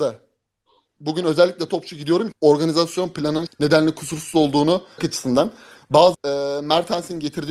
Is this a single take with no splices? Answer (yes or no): no